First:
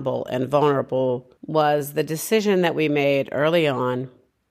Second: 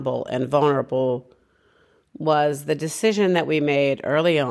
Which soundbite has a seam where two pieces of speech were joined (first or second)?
first